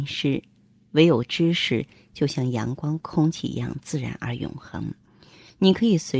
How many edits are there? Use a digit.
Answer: 0